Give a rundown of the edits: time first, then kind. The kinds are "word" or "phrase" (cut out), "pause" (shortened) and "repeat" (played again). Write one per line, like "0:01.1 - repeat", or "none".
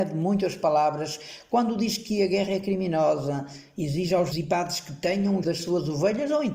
0:04.3 - word
0:05.4 - word